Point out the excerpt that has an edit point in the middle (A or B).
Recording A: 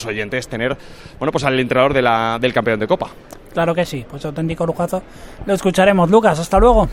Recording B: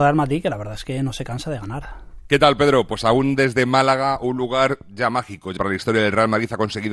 B